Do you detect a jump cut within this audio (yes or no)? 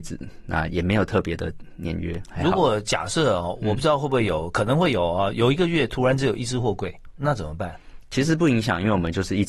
yes